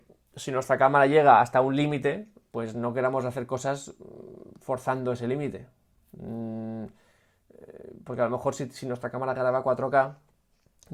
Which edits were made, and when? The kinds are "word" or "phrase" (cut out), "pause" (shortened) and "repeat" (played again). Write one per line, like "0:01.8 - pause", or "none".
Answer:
none